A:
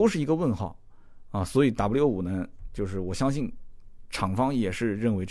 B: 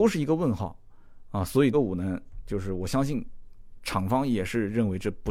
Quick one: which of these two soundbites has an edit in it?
B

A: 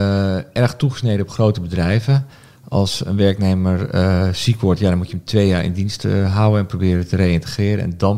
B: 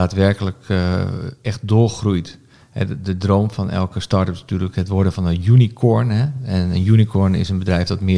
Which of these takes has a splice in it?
B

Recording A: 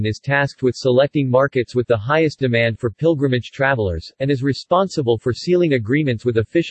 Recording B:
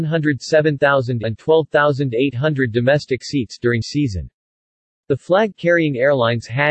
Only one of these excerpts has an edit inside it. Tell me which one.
B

